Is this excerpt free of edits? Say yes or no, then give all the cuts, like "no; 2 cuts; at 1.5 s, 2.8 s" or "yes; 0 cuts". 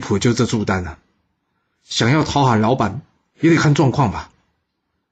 yes; 0 cuts